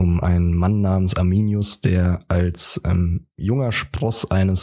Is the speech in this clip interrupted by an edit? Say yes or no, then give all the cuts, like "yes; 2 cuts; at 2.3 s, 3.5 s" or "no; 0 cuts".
no; 0 cuts